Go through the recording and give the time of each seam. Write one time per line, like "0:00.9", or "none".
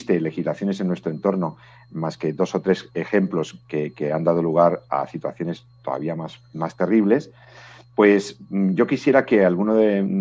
none